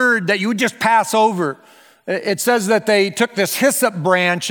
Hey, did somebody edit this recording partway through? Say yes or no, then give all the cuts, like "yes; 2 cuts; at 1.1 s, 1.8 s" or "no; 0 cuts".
no; 0 cuts